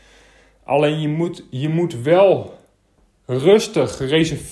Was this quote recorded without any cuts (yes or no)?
yes